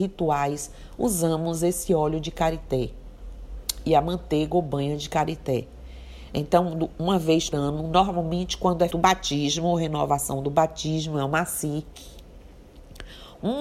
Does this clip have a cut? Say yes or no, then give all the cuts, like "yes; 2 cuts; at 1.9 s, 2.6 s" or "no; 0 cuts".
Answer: yes; 2 cuts; at 7.5 s, 8.9 s